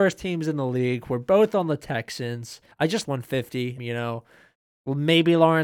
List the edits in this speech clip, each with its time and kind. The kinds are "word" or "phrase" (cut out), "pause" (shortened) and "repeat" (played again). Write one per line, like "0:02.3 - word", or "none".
0:02.7 - pause
0:03.0 - phrase
0:03.8 - phrase